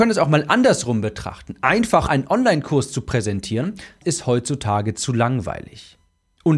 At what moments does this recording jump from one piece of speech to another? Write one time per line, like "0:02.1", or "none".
0:02.1
0:04.0